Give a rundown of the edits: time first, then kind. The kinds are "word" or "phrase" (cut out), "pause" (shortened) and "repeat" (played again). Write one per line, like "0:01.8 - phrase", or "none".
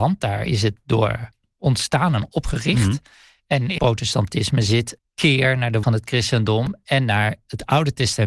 0:03.8 - word
0:05.0 - word
0:05.8 - word